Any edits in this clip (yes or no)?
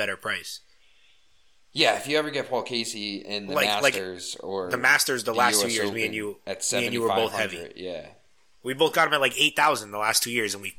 no